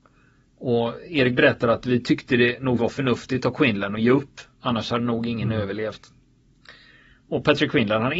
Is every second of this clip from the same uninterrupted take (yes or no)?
no